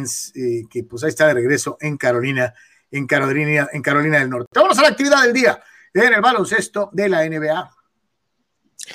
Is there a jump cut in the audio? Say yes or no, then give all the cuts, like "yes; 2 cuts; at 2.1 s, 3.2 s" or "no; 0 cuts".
no; 0 cuts